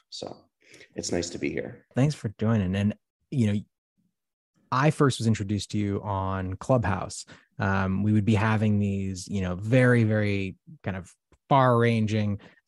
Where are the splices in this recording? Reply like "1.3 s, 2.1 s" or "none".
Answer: none